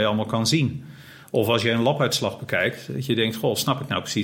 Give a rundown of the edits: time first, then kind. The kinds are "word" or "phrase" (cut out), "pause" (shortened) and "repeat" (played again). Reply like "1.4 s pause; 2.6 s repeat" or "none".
none